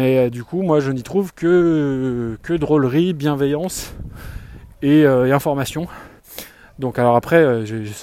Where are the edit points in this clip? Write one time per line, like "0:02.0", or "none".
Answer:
none